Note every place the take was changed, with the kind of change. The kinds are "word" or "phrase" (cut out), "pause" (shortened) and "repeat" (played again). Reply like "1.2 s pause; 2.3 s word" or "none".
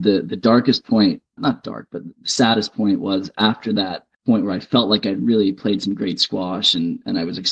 1.4 s word; 4.1 s pause

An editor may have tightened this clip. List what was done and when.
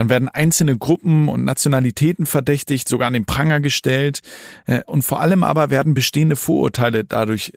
none

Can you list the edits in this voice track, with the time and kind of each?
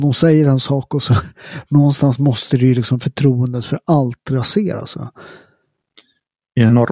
none

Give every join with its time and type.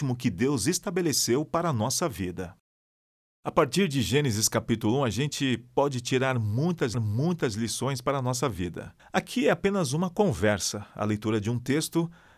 6.9 s repeat; 9.0 s pause

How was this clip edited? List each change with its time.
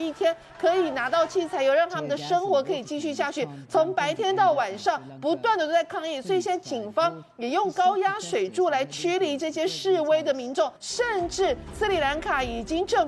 10.8 s pause

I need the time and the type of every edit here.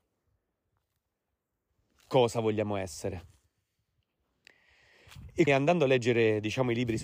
5.5 s word

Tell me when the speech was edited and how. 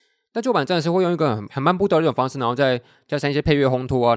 none

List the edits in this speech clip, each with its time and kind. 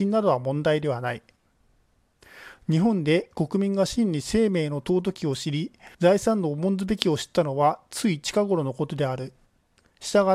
5.9 s pause

